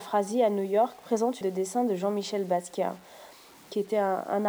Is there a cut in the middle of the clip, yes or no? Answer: yes